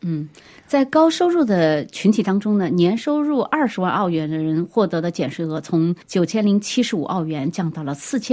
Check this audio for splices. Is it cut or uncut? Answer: cut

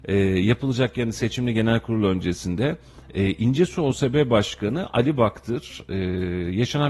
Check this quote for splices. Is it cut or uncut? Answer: uncut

